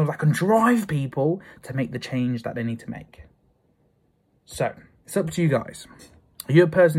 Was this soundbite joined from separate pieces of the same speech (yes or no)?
no